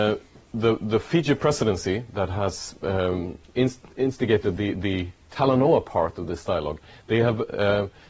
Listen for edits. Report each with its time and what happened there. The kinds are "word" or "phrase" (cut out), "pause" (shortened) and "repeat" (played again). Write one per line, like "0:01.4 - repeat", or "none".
none

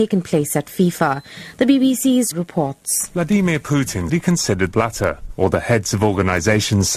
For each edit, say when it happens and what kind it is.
0:02.3 - phrase
0:04.1 - word
0:04.7 - phrase

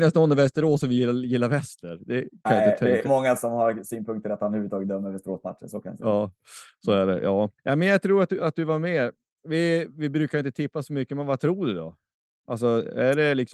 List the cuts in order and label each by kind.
0:03.0 - phrase
0:07.6 - pause

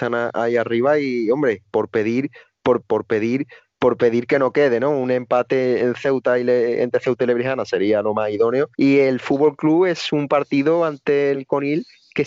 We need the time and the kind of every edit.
0:02.8 - repeat
0:08.7 - pause
0:11.3 - word

